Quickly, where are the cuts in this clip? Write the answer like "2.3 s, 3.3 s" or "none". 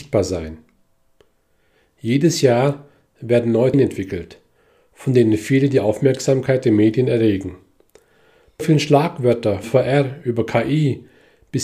3.7 s, 8.6 s, 9.6 s